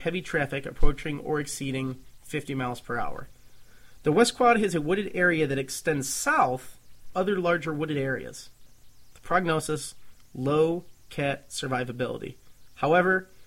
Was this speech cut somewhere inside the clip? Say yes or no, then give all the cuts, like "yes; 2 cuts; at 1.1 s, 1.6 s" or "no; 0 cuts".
yes; 1 cut; at 7.1 s